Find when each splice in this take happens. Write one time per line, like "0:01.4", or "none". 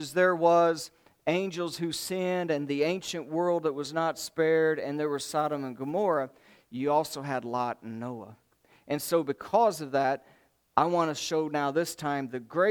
none